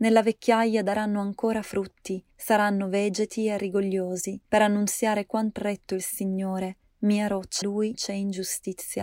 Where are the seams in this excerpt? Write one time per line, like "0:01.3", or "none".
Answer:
0:02.3
0:04.4
0:05.6
0:07.6
0:07.9